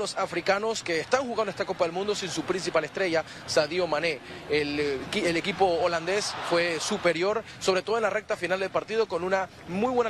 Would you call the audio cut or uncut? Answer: uncut